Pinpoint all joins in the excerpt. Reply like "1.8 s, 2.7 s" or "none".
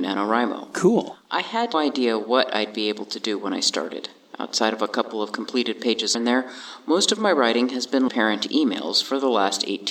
1.7 s, 6.1 s, 8.1 s